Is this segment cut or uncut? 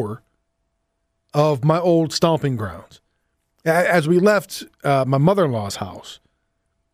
uncut